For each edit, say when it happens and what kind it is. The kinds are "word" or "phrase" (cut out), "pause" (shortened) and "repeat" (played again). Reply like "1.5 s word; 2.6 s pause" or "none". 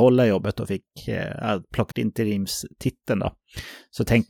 1.9 s word